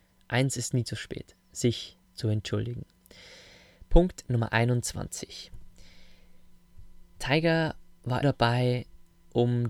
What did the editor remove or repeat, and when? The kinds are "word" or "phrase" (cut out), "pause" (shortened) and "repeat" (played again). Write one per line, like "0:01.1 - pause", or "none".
0:02.0 - pause
0:08.2 - word